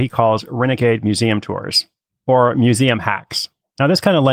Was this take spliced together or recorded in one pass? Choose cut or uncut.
uncut